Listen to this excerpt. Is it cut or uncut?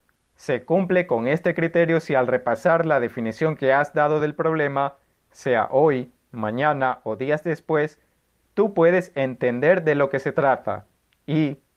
uncut